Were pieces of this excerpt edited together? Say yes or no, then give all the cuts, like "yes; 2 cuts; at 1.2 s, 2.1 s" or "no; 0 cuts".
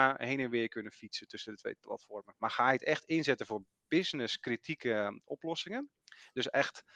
no; 0 cuts